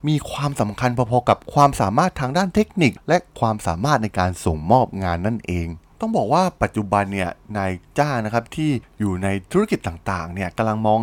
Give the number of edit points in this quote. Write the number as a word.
zero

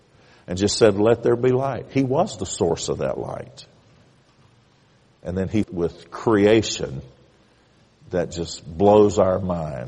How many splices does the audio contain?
one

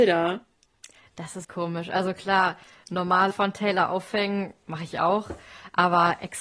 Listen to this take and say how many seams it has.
three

